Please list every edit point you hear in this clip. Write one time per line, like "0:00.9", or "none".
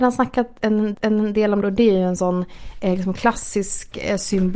0:00.9
0:01.6